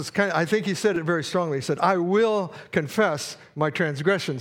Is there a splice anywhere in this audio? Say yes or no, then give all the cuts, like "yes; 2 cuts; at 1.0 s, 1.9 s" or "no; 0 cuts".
no; 0 cuts